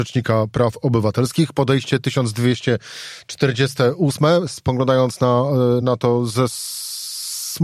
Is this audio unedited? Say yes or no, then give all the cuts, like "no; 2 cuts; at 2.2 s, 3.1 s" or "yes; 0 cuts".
yes; 0 cuts